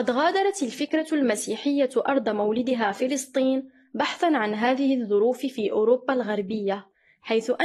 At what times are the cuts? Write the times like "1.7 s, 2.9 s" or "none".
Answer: none